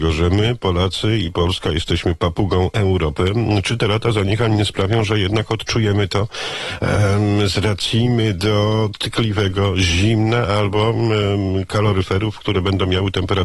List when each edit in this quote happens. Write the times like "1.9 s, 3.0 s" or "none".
none